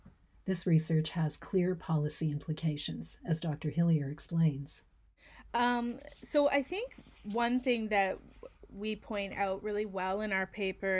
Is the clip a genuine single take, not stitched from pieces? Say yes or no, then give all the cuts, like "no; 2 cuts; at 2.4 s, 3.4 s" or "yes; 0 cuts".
yes; 0 cuts